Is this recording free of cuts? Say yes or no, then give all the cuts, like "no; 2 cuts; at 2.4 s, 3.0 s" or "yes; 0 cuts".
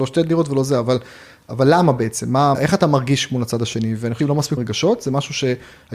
no; 3 cuts; at 2.5 s, 4.2 s, 4.6 s